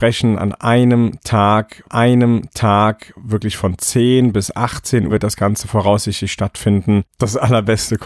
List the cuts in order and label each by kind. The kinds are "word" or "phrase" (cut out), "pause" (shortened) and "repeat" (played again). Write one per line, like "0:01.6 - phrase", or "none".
0:01.8 - repeat
0:05.1 - word
0:07.1 - pause